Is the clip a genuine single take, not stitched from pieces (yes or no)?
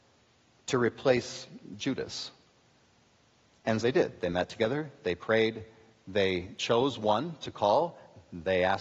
no